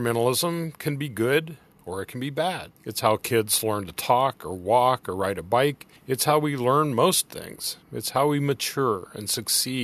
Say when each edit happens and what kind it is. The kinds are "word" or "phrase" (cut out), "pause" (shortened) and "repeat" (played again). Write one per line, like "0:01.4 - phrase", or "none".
0:01.7 - pause
0:02.8 - pause
0:06.0 - pause
0:07.8 - pause